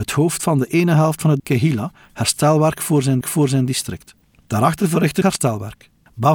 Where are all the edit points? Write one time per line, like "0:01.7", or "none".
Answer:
0:01.4
0:03.2
0:05.2